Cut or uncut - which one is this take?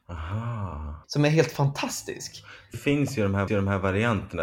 cut